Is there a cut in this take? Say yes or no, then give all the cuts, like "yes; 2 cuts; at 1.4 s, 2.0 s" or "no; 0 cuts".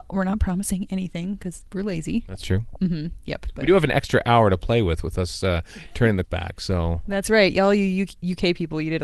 yes; 1 cut; at 6.2 s